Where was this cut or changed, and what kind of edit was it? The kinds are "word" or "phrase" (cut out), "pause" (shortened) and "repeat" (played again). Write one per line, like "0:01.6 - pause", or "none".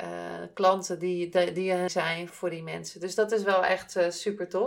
0:01.9 - word
0:02.3 - word